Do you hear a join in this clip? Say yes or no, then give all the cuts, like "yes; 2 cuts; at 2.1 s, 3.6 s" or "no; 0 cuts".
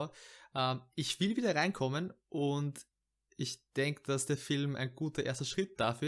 no; 0 cuts